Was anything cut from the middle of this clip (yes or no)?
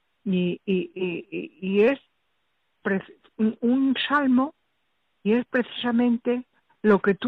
no